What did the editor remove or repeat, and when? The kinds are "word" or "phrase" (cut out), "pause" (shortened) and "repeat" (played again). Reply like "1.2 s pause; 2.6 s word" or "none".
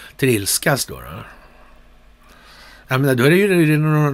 none